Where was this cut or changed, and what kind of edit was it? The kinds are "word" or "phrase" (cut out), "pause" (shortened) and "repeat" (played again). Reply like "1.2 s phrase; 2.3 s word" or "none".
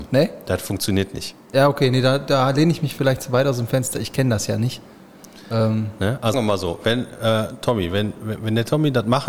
6.3 s word